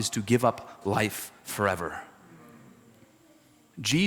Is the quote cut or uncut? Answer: uncut